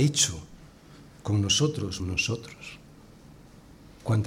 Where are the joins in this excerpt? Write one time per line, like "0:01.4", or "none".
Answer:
0:02.0